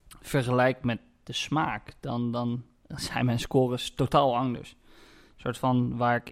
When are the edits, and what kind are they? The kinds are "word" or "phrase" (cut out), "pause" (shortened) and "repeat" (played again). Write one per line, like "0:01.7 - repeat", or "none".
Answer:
none